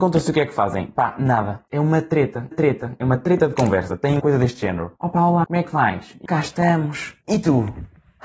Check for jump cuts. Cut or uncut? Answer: cut